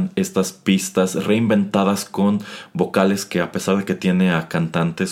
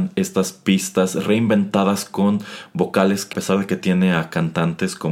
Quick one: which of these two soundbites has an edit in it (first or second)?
second